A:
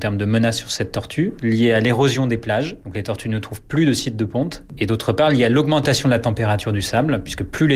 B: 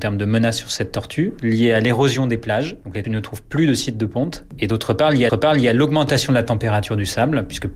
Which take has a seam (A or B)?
B